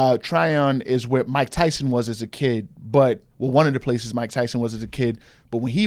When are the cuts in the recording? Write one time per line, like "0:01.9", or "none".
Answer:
none